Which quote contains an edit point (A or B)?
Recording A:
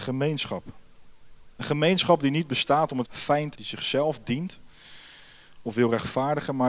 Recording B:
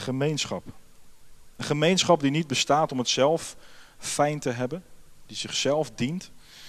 A